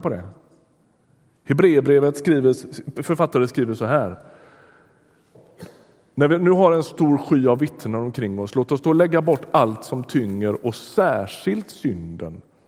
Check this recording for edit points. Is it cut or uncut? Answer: cut